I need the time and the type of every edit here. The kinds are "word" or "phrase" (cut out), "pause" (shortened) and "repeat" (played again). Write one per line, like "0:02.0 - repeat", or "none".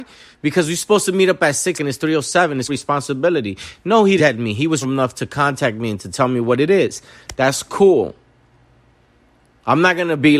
0:01.7 - word
0:02.7 - word
0:04.2 - word
0:04.8 - word